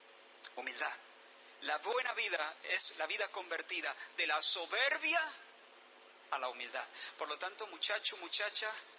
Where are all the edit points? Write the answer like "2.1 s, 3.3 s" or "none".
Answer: none

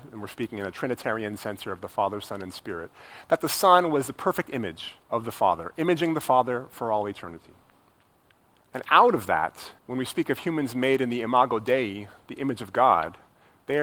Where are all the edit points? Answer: 5.0 s, 8.1 s, 9.8 s

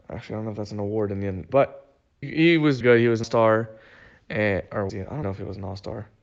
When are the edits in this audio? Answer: 1.5 s, 2.2 s, 2.8 s, 3.2 s, 4.9 s, 5.2 s

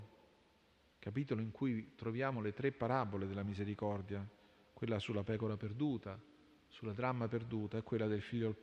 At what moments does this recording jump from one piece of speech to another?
none

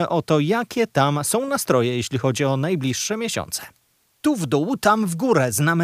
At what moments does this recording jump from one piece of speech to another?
none

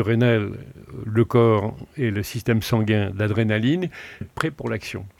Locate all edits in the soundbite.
4.2 s

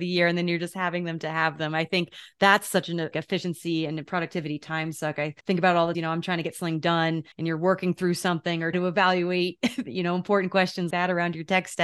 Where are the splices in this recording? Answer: 3.1 s, 5.4 s, 5.9 s, 7.3 s, 8.7 s, 10.9 s

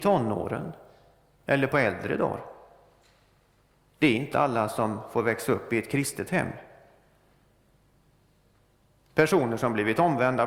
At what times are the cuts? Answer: none

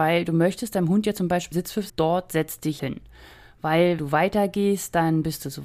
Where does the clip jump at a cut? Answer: 1.5 s, 1.9 s, 2.8 s, 4.0 s

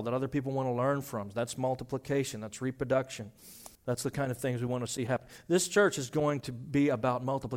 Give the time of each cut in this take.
3.7 s

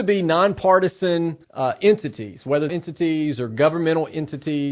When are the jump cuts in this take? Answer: 1.4 s, 2.7 s

